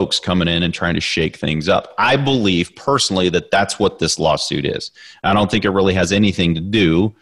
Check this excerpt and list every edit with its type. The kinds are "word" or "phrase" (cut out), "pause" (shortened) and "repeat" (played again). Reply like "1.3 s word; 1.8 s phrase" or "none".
none